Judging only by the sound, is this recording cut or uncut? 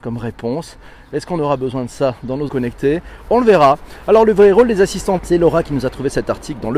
cut